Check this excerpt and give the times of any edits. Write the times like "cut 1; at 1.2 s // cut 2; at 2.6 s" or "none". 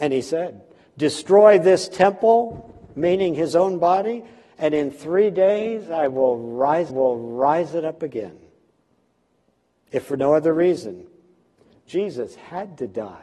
cut 1; at 6.9 s